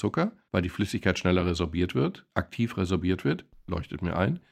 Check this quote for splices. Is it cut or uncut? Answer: uncut